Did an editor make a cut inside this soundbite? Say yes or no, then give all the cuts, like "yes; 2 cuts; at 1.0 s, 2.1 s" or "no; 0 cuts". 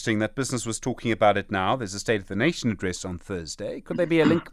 no; 0 cuts